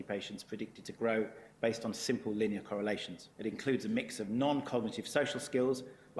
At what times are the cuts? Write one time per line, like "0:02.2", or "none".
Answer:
0:01.5
0:03.3